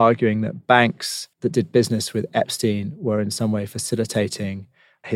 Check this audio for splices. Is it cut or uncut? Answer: cut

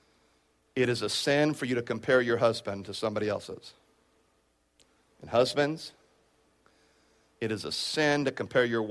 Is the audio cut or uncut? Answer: uncut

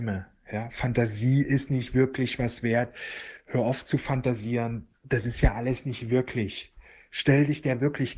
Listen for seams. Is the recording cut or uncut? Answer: uncut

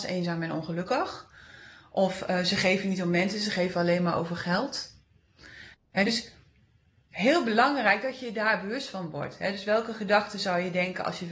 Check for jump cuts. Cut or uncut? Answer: uncut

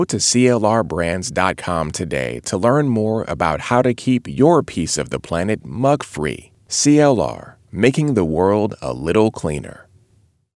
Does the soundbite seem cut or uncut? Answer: uncut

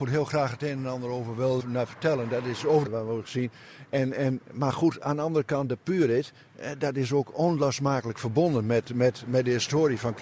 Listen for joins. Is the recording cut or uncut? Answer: cut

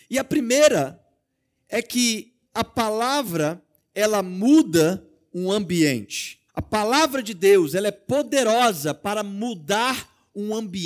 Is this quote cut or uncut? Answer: cut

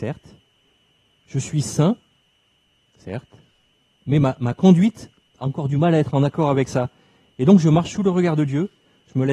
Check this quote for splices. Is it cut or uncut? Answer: uncut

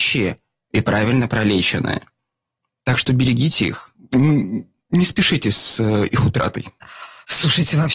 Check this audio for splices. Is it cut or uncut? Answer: uncut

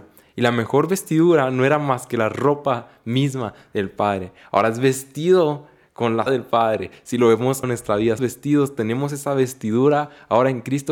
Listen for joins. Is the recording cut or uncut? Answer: cut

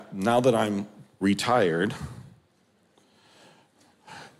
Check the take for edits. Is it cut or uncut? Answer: uncut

